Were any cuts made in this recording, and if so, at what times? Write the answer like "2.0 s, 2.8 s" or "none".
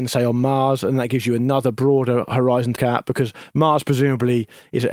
2.8 s